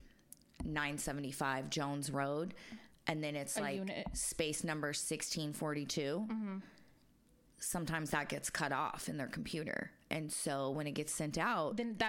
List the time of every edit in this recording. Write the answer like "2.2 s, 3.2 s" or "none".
none